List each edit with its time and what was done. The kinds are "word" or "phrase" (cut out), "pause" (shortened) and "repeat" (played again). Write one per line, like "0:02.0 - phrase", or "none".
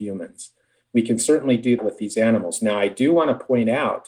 0:01.8 - word